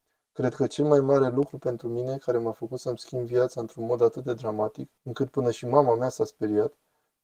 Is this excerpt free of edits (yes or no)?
no